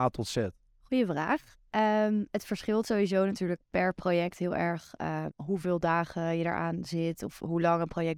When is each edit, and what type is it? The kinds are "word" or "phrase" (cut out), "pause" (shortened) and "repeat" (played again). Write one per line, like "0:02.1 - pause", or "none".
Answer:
0:05.3 - word